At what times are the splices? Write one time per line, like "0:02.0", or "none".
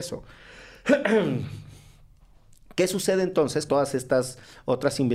0:03.7